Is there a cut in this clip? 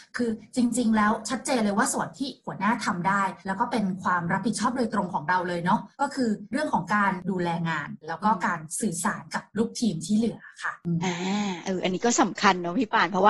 yes; 2 cuts; at 3.4 s, 5.9 s

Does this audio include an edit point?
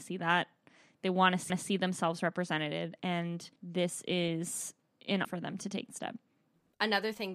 yes; 4 cuts; at 1.5 s, 3.6 s, 5.2 s, 5.9 s

